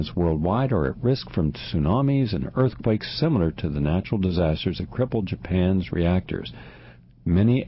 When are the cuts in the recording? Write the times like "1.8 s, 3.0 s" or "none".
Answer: none